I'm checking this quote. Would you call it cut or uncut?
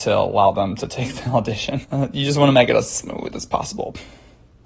cut